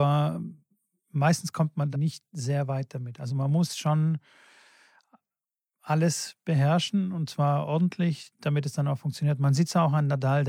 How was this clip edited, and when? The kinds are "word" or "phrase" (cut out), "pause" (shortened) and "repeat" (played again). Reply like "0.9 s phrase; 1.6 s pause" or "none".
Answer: 1.9 s word